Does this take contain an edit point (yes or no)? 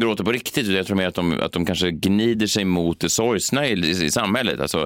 no